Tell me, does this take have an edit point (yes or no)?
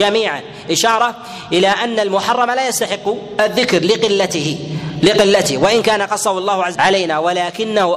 yes